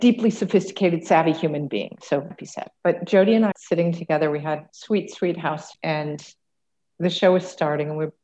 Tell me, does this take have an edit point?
yes; 5 cuts; at 2.3 s, 2.8 s, 3.5 s, 4.7 s, 5.7 s

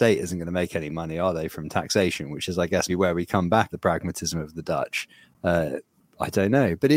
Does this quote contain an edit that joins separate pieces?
yes; 2 cuts; at 2.9 s, 3.7 s

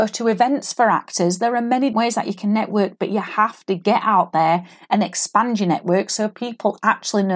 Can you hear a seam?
yes; 1 cut; at 1.9 s

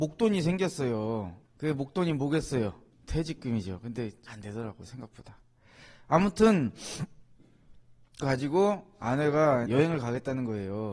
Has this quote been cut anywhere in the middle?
yes; 5 cuts; at 1.5 s, 2.9 s, 4.3 s, 8.2 s, 9.7 s

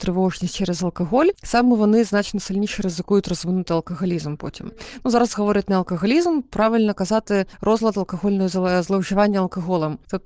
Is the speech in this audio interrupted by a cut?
yes; 1 cut; at 7.5 s

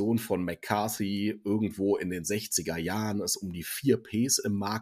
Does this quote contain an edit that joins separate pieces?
no; 0 cuts

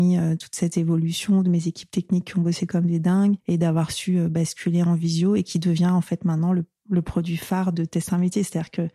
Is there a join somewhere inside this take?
no; 0 cuts

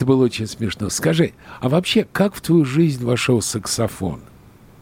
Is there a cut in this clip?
no; 0 cuts

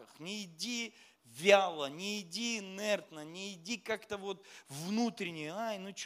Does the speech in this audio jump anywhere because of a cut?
no; 0 cuts

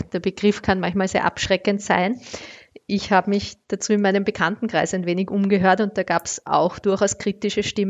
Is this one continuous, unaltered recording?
yes; 0 cuts

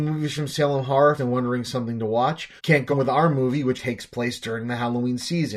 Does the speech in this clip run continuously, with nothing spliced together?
no; 4 cuts; at 1.2 s, 2.6 s, 2.9 s, 3.8 s

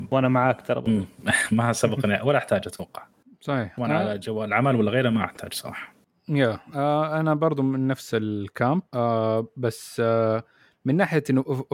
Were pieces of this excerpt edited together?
yes; 1 cut; at 8.9 s

